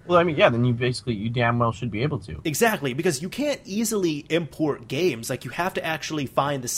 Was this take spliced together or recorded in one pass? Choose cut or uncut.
uncut